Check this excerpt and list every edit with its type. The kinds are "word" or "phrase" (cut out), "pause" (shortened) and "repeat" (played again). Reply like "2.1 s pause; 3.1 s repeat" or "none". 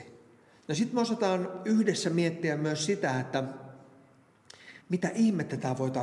4.8 s pause